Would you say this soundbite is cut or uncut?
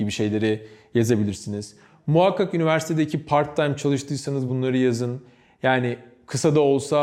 uncut